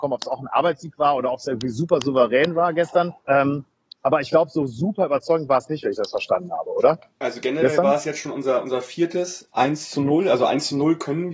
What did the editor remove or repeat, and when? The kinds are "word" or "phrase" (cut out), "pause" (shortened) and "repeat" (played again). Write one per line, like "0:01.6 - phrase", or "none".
0:03.2 - pause